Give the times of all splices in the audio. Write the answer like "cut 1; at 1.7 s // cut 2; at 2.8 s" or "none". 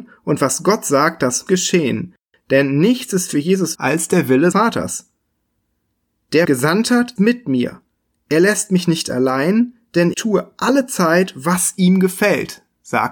cut 1; at 1.5 s // cut 2; at 3.7 s // cut 3; at 4.5 s // cut 4; at 6.4 s // cut 5; at 7.2 s // cut 6; at 10.1 s